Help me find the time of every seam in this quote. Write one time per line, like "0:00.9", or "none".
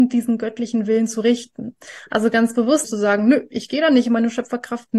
0:02.8